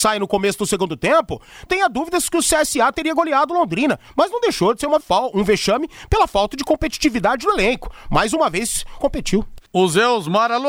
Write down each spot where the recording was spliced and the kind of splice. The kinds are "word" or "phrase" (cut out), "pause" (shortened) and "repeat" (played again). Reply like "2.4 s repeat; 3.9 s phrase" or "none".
1.7 s word; 5.0 s word; 9.0 s phrase; 9.7 s pause